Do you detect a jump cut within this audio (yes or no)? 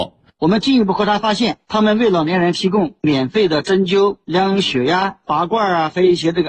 no